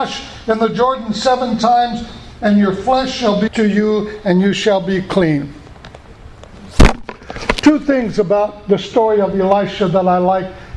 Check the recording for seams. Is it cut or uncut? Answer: cut